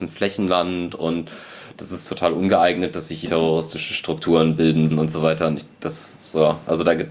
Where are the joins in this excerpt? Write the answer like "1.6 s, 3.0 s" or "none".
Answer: 3.2 s, 4.9 s, 5.7 s